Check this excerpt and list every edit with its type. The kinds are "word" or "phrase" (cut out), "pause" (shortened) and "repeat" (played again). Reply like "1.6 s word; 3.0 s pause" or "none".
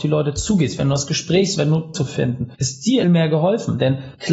1.6 s word; 1.9 s phrase; 3.0 s phrase